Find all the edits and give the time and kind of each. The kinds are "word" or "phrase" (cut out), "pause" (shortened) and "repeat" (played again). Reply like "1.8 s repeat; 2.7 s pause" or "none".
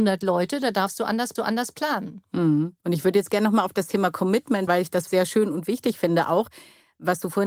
1.4 s repeat; 2.8 s pause; 4.7 s word; 5.1 s word